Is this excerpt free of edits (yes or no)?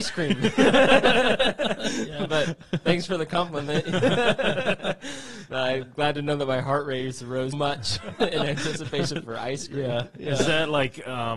no